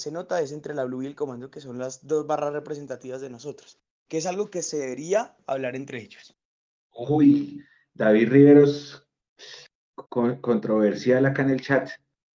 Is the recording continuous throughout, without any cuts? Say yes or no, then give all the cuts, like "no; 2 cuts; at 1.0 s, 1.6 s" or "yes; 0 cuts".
no; 2 cuts; at 6.7 s, 10.1 s